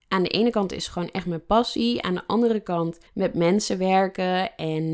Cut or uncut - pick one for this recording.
cut